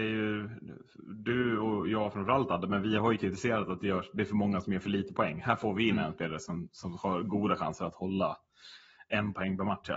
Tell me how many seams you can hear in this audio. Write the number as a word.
zero